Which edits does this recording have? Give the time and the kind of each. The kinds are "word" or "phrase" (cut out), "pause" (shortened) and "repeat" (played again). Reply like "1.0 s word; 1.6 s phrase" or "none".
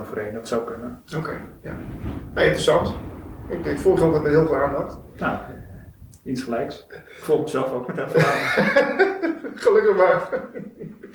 3.6 s word